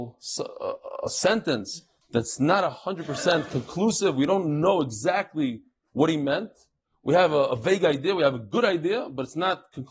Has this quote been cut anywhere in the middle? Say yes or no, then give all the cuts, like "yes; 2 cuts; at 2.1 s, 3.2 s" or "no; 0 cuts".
no; 0 cuts